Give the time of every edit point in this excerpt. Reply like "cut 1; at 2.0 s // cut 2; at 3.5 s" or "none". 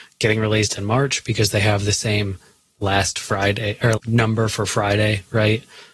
cut 1; at 4.0 s